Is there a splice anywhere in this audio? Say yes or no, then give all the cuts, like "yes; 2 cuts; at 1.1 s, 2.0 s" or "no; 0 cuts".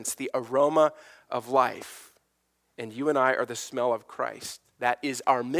no; 0 cuts